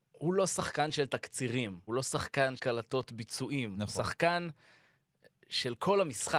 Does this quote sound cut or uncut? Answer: cut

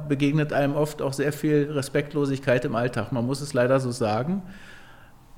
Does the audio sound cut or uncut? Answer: uncut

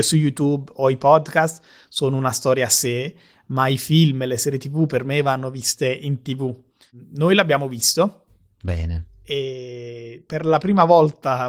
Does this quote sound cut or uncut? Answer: uncut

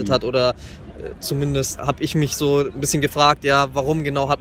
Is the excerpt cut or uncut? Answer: cut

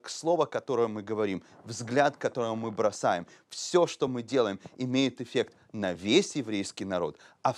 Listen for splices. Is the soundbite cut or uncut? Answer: uncut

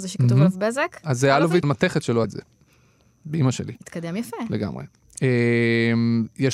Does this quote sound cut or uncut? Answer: cut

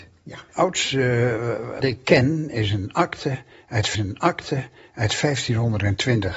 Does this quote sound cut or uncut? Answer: cut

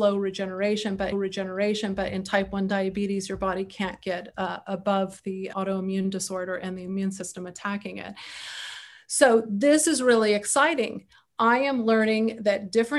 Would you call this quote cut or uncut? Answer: cut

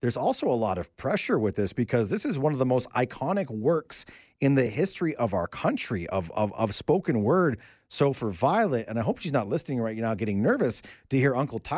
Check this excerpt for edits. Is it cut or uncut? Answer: uncut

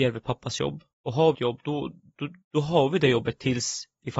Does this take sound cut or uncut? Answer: cut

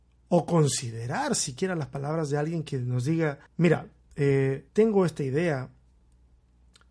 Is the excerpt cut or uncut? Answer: cut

